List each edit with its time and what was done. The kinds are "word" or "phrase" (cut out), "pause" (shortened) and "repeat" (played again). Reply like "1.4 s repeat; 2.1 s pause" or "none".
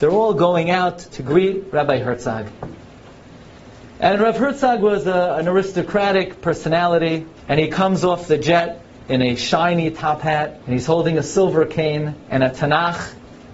7.4 s pause; 10.6 s pause; 12.2 s pause